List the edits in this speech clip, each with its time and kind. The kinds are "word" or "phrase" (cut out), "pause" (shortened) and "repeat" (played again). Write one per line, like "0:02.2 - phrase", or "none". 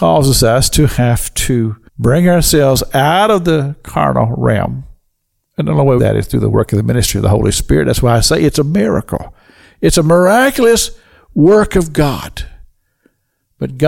0:01.9 - pause
0:06.0 - phrase